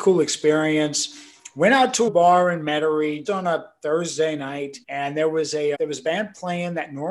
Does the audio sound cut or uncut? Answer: cut